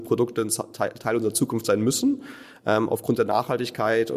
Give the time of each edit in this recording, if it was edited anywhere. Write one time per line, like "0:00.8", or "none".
none